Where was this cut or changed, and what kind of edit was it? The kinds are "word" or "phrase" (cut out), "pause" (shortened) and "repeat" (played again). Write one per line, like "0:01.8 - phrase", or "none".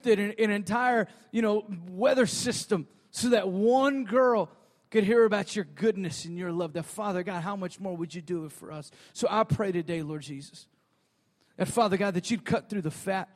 none